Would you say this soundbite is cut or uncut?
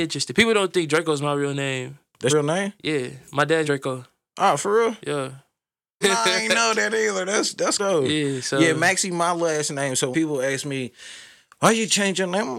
cut